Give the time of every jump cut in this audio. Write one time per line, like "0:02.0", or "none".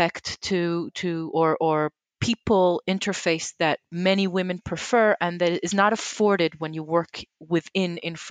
none